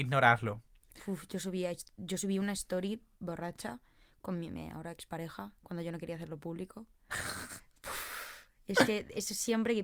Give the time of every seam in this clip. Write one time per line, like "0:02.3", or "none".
0:03.1